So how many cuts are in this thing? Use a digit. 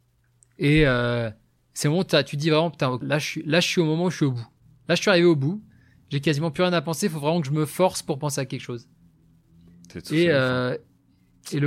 2